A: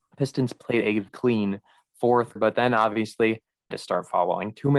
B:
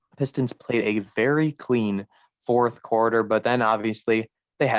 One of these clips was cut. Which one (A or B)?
A